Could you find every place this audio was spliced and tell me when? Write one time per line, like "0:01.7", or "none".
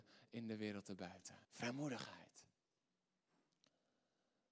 0:01.4